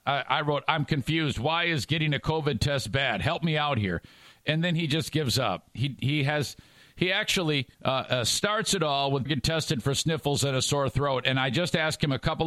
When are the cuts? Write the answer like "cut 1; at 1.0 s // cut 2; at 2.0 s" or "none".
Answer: cut 1; at 7.7 s // cut 2; at 9.3 s